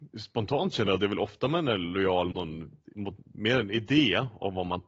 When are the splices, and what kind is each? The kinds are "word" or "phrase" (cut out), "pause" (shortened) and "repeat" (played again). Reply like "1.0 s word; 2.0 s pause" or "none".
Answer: 2.3 s word; 2.9 s word

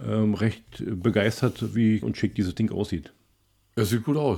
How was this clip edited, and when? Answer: 2.0 s word

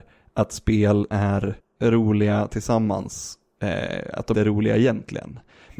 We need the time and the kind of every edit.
1.1 s word; 1.6 s pause; 4.3 s word

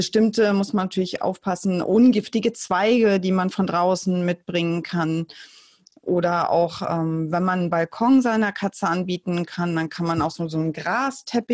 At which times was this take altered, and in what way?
none

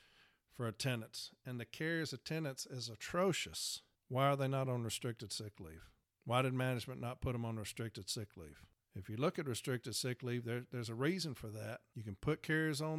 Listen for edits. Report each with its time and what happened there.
none

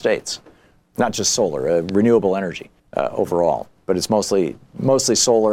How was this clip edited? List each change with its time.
2.8 s pause

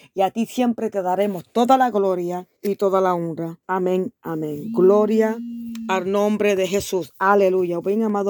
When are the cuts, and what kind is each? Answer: 2.6 s pause; 3.6 s pause

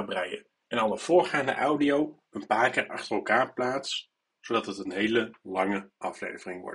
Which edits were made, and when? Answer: none

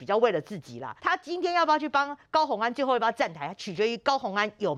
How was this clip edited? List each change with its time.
1.0 s pause

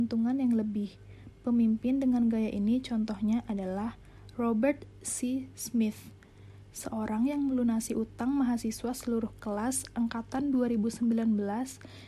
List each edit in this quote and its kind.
none

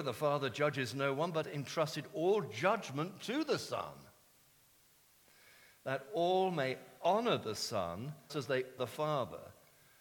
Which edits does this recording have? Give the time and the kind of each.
1.4 s word; 8.3 s word; 8.8 s word

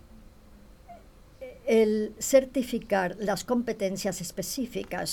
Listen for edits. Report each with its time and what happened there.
none

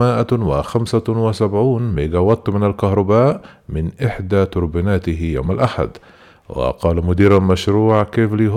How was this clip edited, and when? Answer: none

